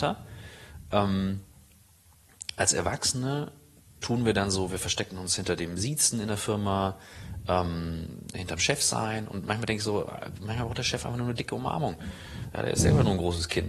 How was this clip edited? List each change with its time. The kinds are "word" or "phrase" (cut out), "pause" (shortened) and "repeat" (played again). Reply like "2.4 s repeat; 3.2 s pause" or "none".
none

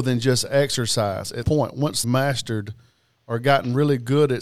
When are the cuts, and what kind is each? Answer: 1.4 s word; 2.0 s word

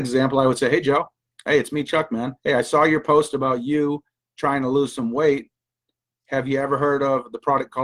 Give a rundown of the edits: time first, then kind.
2.4 s pause

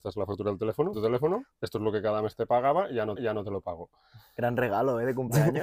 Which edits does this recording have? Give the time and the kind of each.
0.9 s word; 1.5 s pause; 3.2 s repeat

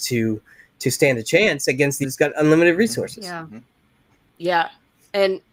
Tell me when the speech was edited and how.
2.0 s word

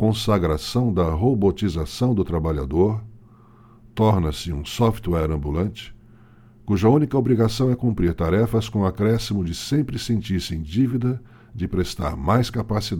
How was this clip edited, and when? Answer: none

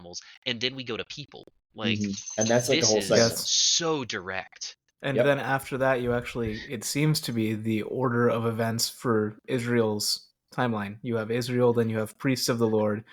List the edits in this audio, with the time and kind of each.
none

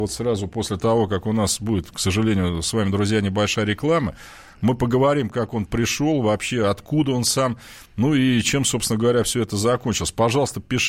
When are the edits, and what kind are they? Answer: 7.9 s pause

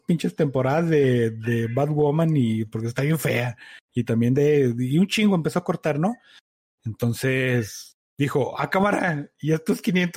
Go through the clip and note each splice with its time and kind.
none

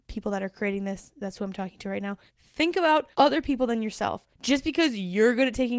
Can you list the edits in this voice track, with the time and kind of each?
2.3 s pause; 3.1 s pause; 4.3 s pause

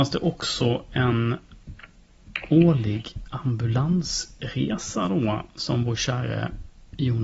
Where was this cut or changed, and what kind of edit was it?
none

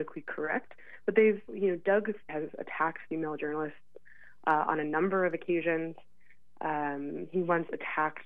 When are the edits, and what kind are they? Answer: 1.5 s phrase; 2.3 s word

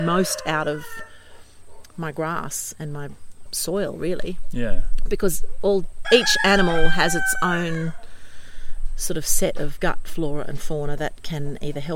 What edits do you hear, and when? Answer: 3.5 s word; 6.0 s word

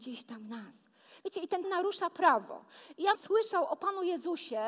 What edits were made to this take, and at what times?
1.6 s word; 3.1 s phrase

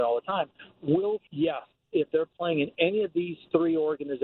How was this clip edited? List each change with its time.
1.3 s word

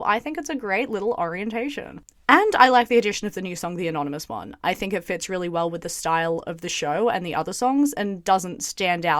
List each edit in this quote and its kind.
none

